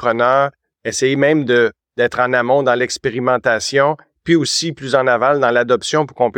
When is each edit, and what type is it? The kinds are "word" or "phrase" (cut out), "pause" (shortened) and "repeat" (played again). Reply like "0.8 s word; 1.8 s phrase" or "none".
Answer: none